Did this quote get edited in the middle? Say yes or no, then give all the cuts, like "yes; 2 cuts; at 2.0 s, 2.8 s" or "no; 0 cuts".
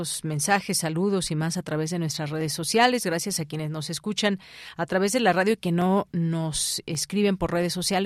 no; 0 cuts